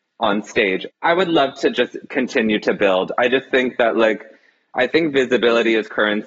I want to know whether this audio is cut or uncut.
uncut